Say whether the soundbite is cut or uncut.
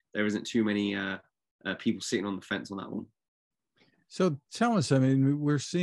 uncut